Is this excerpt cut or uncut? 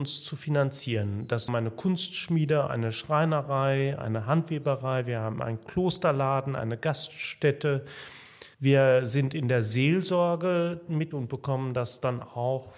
cut